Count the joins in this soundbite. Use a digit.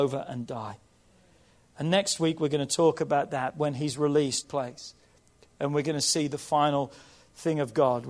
1